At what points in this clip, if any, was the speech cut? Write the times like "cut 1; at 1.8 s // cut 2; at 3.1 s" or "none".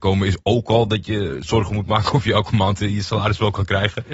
none